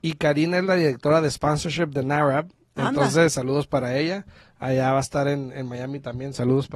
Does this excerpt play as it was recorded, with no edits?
yes; 0 cuts

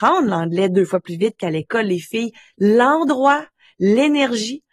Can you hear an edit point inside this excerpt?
yes; 1 cut; at 2.5 s

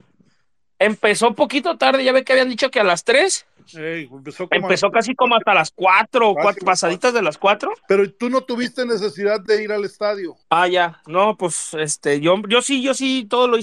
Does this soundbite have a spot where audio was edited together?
yes; 2 cuts; at 7.8 s, 10.4 s

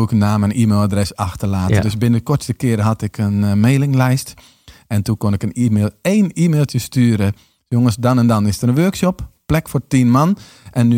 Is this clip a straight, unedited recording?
yes; 0 cuts

